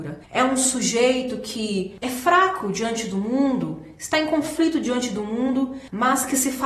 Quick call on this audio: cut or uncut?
uncut